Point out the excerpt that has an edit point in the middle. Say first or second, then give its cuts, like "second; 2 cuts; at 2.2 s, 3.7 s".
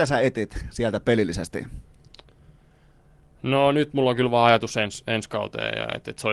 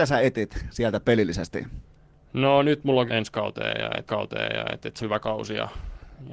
second; 4 cuts; at 1.9 s, 3.1 s, 4.1 s, 5.0 s